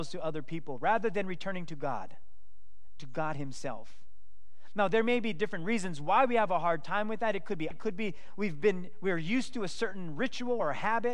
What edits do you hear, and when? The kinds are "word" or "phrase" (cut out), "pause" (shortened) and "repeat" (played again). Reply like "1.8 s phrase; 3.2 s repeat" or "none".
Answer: 7.7 s word